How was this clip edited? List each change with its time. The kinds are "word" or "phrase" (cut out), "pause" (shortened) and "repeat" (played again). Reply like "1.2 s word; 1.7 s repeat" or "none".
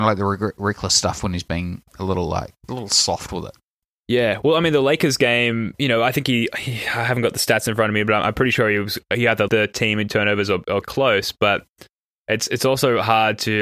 2.7 s word; 3.8 s pause; 9.5 s word; 10.8 s phrase